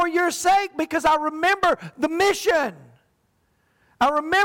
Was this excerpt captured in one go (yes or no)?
yes